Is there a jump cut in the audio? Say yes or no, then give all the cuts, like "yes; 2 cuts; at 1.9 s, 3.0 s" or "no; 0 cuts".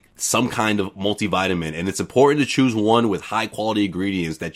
no; 0 cuts